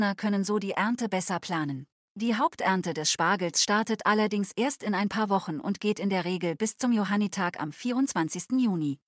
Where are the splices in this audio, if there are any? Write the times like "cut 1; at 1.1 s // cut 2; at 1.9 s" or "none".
cut 1; at 1.9 s